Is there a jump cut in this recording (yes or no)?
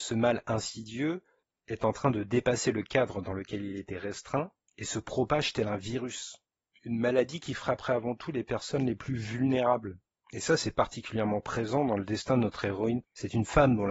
no